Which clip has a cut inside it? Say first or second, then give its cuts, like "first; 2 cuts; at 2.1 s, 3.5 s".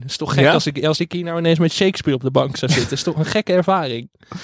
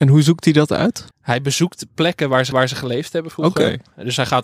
second; 2 cuts; at 1.1 s, 2.5 s